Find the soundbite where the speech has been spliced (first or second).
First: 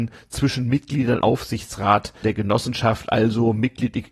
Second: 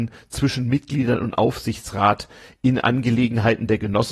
first